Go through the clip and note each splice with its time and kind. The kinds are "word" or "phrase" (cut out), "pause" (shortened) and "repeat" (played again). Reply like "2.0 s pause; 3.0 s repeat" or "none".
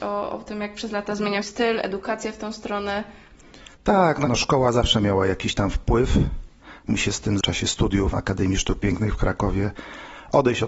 1.4 s phrase; 3.7 s pause; 4.3 s word; 6.9 s phrase; 7.4 s phrase; 8.1 s word